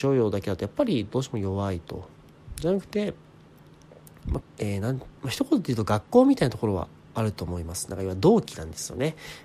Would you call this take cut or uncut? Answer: cut